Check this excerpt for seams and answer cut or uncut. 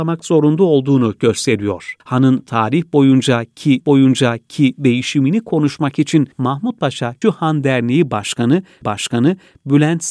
cut